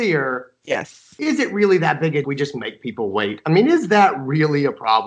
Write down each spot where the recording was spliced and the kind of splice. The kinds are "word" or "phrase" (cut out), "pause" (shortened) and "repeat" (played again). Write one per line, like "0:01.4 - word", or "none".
0:02.2 - phrase